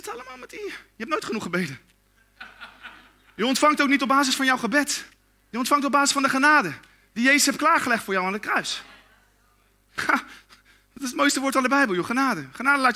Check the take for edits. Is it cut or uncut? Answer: uncut